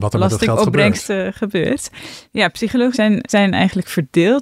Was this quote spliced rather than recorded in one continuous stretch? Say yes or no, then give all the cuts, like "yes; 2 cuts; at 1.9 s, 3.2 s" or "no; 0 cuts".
yes; 3 cuts; at 2.3 s, 2.9 s, 3.3 s